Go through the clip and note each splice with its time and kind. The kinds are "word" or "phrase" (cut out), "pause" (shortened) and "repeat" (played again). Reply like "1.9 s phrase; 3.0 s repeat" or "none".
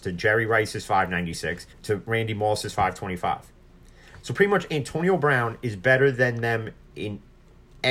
1.7 s pause